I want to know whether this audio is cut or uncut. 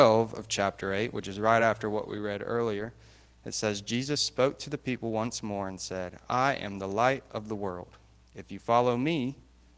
uncut